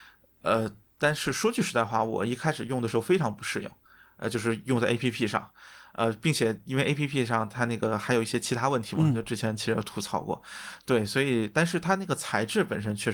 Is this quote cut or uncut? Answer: uncut